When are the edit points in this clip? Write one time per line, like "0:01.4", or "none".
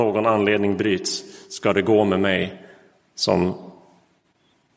none